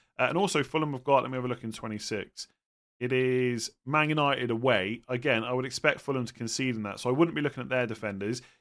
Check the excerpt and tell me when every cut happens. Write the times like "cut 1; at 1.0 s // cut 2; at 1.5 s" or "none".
none